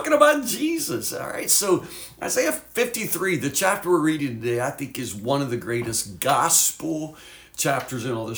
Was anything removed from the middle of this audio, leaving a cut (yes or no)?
no